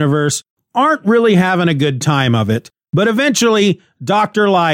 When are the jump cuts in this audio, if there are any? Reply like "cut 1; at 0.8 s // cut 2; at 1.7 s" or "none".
none